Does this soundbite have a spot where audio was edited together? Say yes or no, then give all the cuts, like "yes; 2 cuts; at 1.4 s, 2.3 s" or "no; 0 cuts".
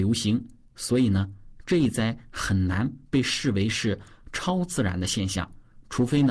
no; 0 cuts